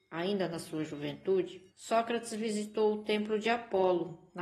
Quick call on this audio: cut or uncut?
cut